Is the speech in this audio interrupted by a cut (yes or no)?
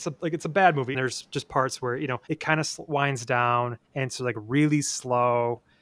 yes